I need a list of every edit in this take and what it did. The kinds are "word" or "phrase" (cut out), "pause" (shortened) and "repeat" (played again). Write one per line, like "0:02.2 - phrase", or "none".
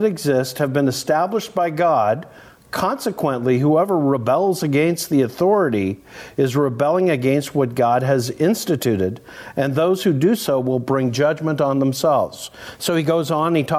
none